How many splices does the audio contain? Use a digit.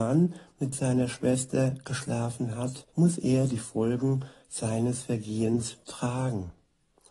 1